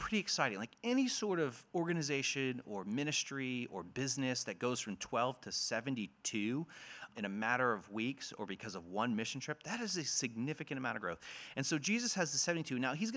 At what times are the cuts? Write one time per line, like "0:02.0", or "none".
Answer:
0:07.1

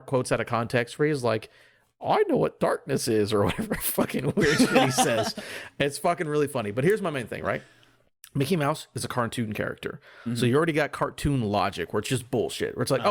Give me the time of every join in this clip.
none

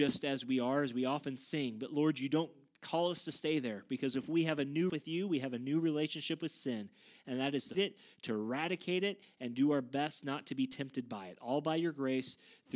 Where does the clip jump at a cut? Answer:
0:04.9
0:07.7

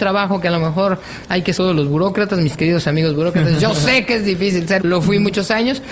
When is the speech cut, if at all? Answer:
0:01.5
0:04.8

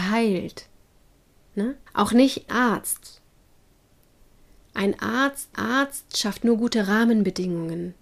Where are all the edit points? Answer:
0:01.9
0:02.5
0:05.5

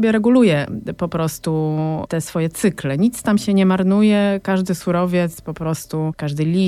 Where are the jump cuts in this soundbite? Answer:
none

